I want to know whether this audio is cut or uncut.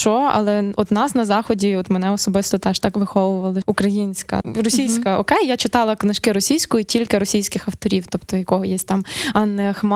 cut